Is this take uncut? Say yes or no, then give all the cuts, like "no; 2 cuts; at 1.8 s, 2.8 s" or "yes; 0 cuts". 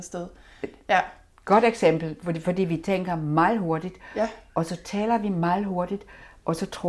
yes; 0 cuts